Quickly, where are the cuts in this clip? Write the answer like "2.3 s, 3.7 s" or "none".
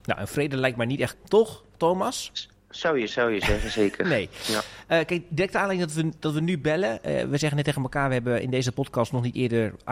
1.1 s, 3.1 s